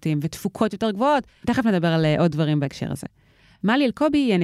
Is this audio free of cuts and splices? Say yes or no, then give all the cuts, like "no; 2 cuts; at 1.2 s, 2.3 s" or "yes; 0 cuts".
yes; 0 cuts